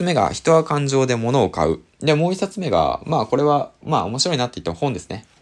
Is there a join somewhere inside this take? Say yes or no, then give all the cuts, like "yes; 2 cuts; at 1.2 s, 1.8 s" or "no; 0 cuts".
yes; 1 cut; at 3.8 s